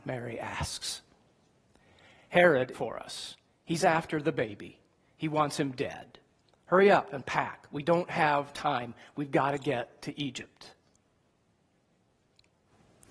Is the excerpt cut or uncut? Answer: cut